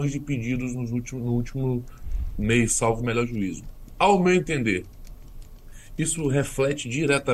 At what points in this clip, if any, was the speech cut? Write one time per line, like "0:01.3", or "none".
none